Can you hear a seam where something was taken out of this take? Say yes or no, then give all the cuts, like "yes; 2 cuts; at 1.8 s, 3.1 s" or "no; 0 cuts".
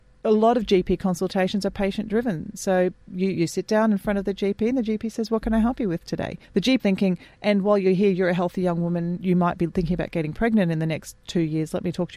yes; 3 cuts; at 3.0 s, 6.4 s, 6.8 s